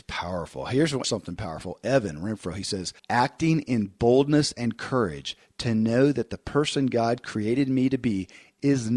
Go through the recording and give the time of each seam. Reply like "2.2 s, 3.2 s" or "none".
1.0 s, 3.0 s